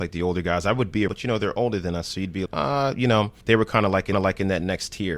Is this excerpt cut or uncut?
cut